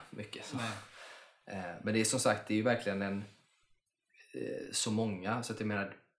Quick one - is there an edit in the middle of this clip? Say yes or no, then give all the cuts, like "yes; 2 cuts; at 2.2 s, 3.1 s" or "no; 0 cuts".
no; 0 cuts